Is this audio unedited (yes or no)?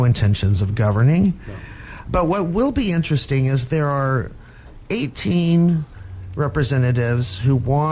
yes